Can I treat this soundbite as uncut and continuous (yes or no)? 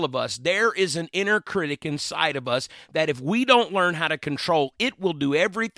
yes